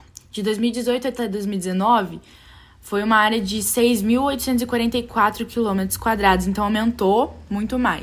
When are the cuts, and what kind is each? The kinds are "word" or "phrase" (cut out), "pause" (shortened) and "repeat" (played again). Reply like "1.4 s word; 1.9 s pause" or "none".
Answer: none